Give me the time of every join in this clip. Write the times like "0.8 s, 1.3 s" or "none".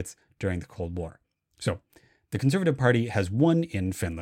1.3 s